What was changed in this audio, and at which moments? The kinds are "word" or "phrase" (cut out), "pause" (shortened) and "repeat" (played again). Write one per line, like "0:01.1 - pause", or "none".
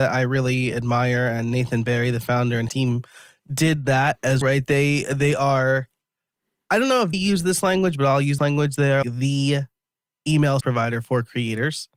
0:02.7 - word
0:04.4 - word
0:07.1 - word
0:08.4 - word
0:09.0 - word
0:10.6 - word

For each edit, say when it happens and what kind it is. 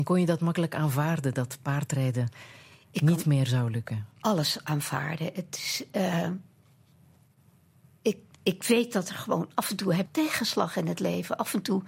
0:10.1 - word

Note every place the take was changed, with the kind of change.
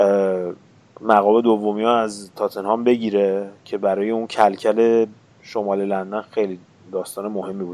0:05.3 - pause

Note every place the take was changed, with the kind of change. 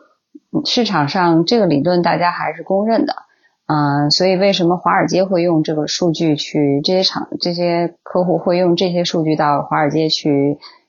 0:04.1 - phrase

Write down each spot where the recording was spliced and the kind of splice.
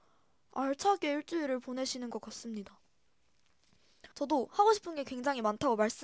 0:04.1 - pause

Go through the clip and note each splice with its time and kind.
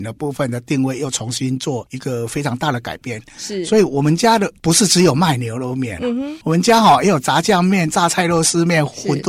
0:06.4 - pause

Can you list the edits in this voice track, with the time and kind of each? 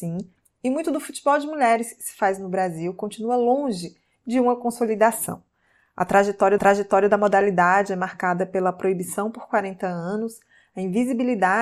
0:06.6 - repeat

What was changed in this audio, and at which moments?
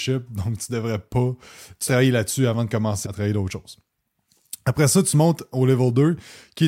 0:01.9 - word
0:03.0 - word

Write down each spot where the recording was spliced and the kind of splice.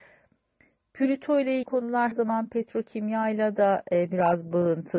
0:01.6 - word
0:02.1 - word

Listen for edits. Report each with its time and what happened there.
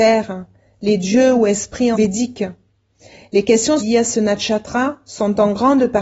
0:01.9 - word
0:03.8 - word

